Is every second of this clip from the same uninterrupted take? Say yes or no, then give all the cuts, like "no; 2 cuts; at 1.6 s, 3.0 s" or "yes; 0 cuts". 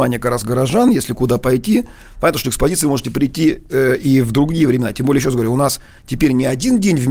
yes; 0 cuts